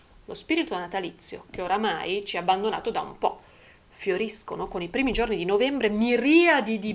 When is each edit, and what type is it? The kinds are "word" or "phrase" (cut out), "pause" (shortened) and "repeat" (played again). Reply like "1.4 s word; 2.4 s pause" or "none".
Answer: none